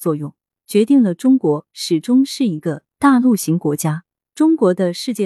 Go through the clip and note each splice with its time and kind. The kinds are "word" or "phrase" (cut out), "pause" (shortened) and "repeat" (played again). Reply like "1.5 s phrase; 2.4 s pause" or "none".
none